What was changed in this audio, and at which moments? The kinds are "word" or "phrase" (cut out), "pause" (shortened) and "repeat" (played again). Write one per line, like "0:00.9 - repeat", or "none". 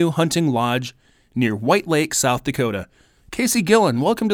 none

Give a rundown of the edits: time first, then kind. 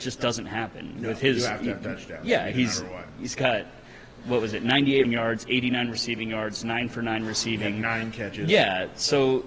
0:05.0 - word

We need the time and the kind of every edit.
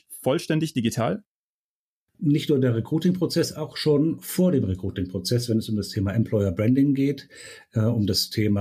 none

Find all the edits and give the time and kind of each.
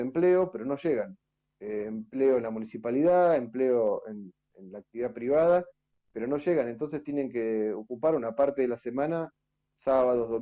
none

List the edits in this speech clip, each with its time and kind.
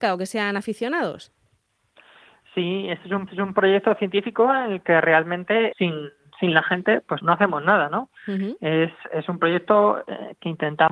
0:03.3 - repeat
0:05.7 - word
0:07.2 - word

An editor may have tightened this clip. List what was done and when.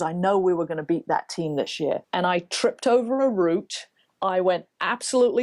0:02.0 - pause

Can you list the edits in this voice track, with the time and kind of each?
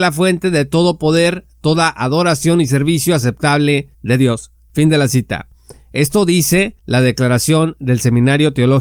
0:03.9 - pause
0:06.8 - pause

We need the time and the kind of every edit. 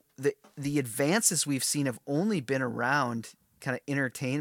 none

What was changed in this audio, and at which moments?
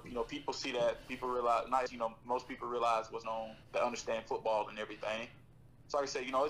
0:01.9 - word
0:03.2 - word
0:03.6 - pause

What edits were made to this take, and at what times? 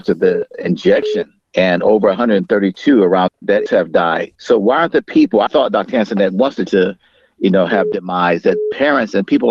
0:01.4 - pause
0:03.3 - word
0:03.7 - phrase
0:04.3 - pause
0:05.5 - word
0:06.7 - phrase

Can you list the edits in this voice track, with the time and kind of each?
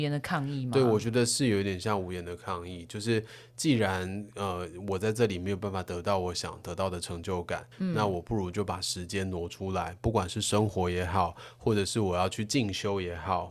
0:07.7 - pause

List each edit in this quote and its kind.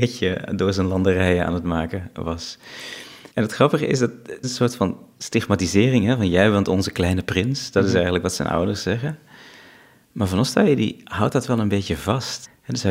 0:03.3 - pause
0:04.4 - phrase

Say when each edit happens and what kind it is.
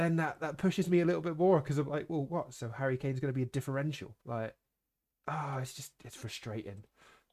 0:04.2 - pause

